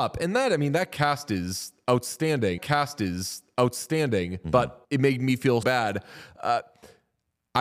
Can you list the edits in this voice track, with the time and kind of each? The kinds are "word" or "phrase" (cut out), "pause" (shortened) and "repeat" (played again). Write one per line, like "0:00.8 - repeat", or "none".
0:02.6 - repeat
0:04.8 - pause
0:05.6 - word